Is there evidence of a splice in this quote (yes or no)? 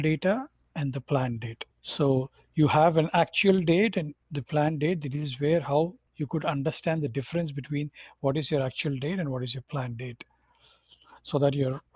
yes